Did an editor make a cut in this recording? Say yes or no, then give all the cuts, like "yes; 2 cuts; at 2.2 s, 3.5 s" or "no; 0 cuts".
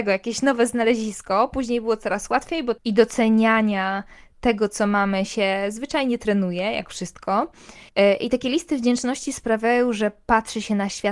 yes; 2 cuts; at 2.8 s, 7.9 s